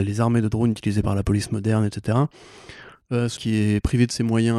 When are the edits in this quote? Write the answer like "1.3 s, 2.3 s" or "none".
3.4 s

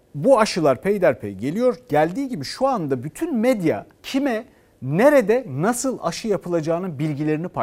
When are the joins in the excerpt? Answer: 3.9 s

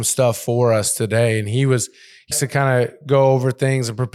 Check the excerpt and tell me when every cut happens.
2.3 s

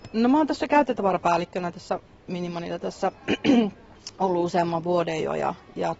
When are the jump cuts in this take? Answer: none

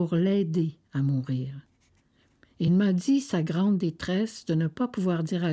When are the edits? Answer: none

